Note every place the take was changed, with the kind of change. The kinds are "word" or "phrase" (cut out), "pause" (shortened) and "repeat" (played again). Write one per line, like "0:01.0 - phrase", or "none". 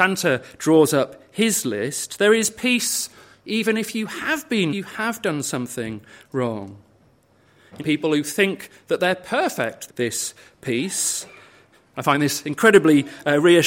0:04.7 - phrase
0:07.8 - phrase
0:09.9 - phrase